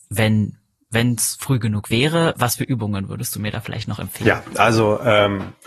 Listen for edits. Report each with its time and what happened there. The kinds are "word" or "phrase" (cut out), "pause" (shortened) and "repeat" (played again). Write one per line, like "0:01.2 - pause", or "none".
none